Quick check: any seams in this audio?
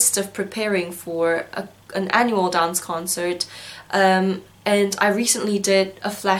no; 0 cuts

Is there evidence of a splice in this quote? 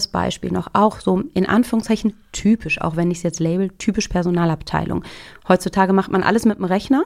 no; 0 cuts

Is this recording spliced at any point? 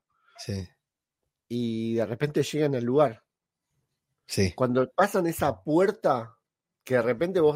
no; 0 cuts

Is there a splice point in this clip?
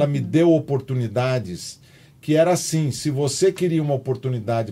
no; 0 cuts

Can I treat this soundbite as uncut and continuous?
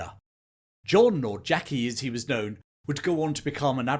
yes; 0 cuts

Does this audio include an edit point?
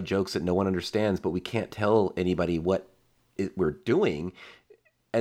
no; 0 cuts

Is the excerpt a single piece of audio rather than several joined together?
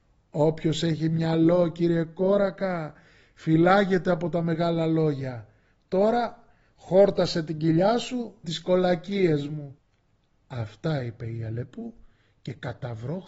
no; 1 cut; at 8.4 s

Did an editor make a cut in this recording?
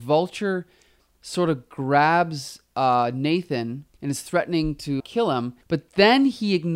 yes; 3 cuts; at 3.9 s, 5.0 s, 5.6 s

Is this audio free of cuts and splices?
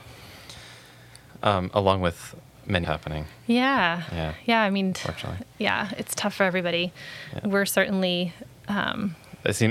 no; 1 cut; at 2.8 s

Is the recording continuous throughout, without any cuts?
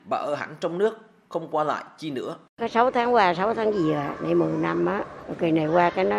no; 1 cut; at 2.5 s

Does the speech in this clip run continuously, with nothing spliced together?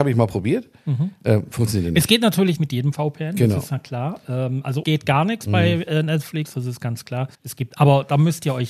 no; 3 cuts; at 2.6 s, 4.8 s, 7.3 s

